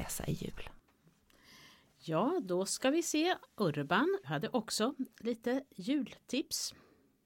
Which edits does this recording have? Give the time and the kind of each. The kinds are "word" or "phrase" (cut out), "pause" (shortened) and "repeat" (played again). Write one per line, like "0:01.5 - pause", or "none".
0:04.2 - word